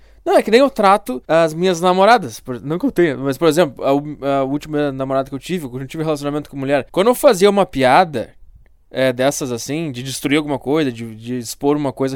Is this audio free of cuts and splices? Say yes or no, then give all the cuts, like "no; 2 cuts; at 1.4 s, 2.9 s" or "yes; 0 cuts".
no; 2 cuts; at 1.2 s, 6.9 s